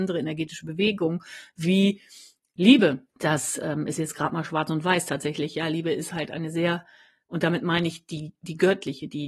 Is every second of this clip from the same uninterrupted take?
yes; 0 cuts

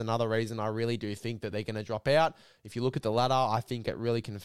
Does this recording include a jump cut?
no; 0 cuts

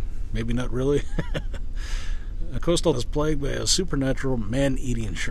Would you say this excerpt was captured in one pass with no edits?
no; 2 cuts; at 2.6 s, 2.9 s

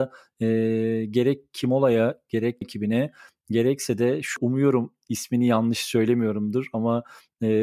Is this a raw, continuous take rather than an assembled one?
no; 2 cuts; at 2.6 s, 4.4 s

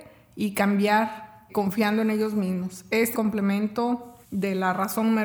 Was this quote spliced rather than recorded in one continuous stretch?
yes; 3 cuts; at 1.5 s, 3.1 s, 4.2 s

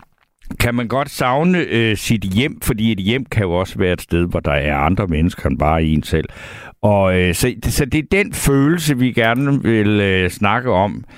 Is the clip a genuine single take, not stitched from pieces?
yes; 0 cuts

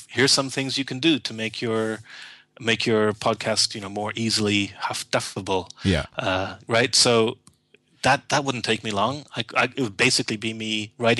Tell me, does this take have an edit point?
no; 0 cuts

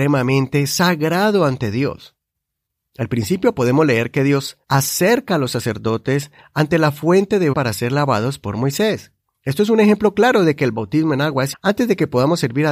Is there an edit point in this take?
yes; 4 cuts; at 4.6 s, 7.5 s, 9.2 s, 11.5 s

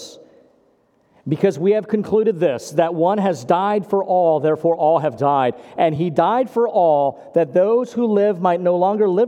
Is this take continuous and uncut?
yes; 0 cuts

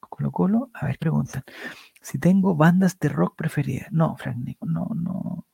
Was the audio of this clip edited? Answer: yes; 2 cuts; at 1.0 s, 4.6 s

